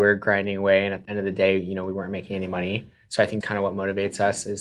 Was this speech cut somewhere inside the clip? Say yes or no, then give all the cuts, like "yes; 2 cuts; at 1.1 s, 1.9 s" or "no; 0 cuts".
yes; 2 cuts; at 1.1 s, 3.4 s